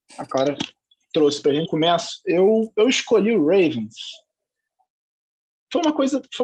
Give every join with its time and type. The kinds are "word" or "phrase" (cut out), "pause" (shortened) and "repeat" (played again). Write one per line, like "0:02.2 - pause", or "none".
0:01.6 - word